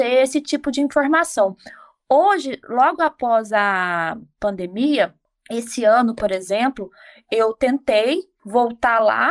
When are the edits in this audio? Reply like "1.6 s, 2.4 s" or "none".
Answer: none